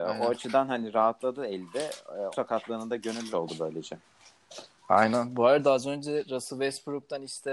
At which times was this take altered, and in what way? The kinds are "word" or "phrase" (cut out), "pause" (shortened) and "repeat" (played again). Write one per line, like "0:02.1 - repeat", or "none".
0:02.3 - word
0:03.3 - phrase